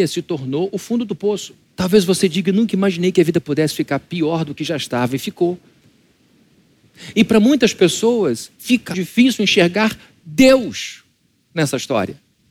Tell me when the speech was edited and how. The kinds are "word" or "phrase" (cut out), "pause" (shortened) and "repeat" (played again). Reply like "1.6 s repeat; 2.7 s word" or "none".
1.6 s pause; 8.9 s word